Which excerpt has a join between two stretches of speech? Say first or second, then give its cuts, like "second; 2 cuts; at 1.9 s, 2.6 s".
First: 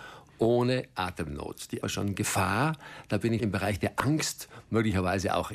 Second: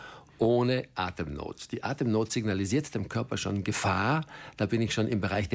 first; 2 cuts; at 1.8 s, 3.4 s